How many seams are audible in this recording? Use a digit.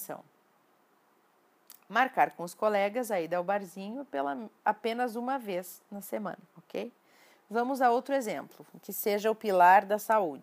2